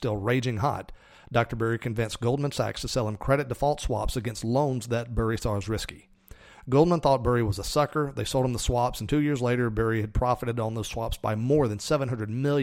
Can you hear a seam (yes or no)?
no